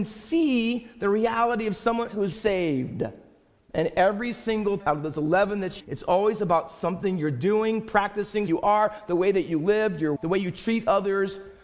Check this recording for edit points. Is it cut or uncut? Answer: cut